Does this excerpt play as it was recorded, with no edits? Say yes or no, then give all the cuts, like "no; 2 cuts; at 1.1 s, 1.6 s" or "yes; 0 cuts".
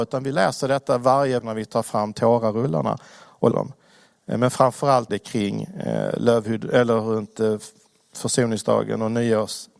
no; 3 cuts; at 1.4 s, 3.5 s, 5.1 s